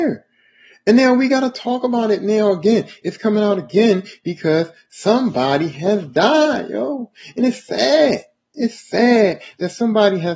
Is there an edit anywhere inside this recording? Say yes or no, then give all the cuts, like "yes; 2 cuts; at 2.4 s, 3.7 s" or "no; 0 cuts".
no; 0 cuts